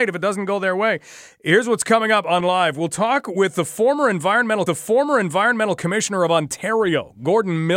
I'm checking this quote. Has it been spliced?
yes; 2 cuts; at 2.4 s, 4.7 s

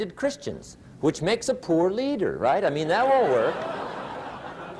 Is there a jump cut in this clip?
no; 0 cuts

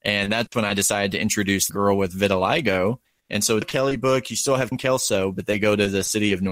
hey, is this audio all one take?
no; 4 cuts; at 1.7 s, 3.0 s, 3.6 s, 4.7 s

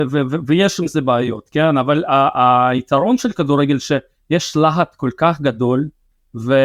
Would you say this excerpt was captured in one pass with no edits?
yes; 0 cuts

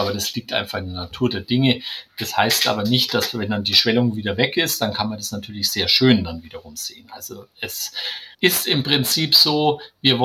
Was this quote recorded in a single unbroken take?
no; 1 cut; at 8.3 s

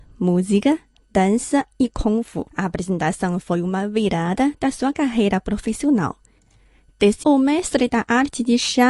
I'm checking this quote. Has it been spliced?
yes; 2 cuts; at 2.5 s, 7.2 s

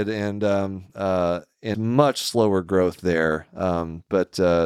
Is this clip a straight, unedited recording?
no; 1 cut; at 1.7 s

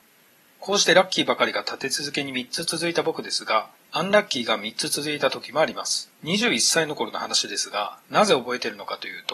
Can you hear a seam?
yes; 1 cut; at 6.1 s

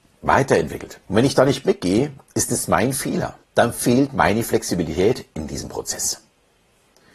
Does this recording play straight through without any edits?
no; 2 cuts; at 1.0 s, 3.4 s

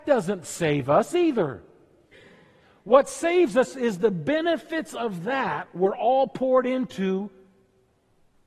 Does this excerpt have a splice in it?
no; 0 cuts

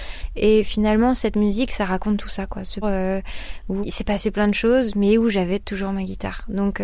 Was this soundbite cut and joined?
yes; 2 cuts; at 2.8 s, 3.8 s

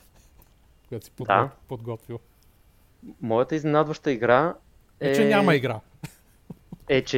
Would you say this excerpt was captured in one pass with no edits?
yes; 0 cuts

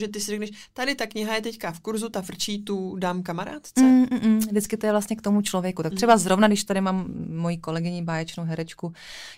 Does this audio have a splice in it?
no; 0 cuts

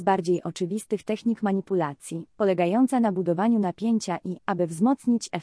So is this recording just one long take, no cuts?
no; 1 cut; at 4.4 s

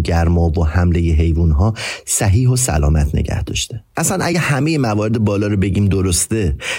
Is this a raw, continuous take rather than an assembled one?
yes; 0 cuts

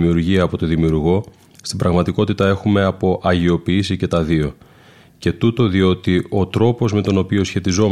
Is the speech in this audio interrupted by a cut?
no; 0 cuts

